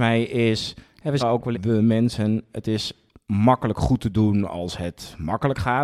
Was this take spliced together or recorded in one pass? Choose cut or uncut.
cut